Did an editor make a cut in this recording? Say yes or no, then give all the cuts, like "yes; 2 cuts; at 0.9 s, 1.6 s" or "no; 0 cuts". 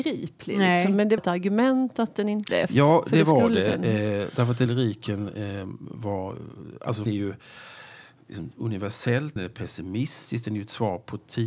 yes; 5 cuts; at 1.2 s, 2.5 s, 4.7 s, 7.1 s, 9.4 s